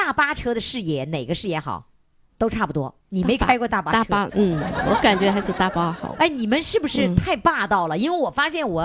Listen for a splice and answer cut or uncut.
cut